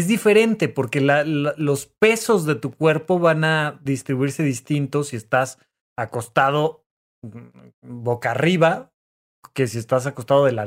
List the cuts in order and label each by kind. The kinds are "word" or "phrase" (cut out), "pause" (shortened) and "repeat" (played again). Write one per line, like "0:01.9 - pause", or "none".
none